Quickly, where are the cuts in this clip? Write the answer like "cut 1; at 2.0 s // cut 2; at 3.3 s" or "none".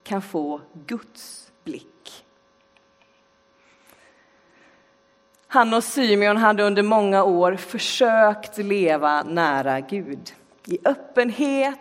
none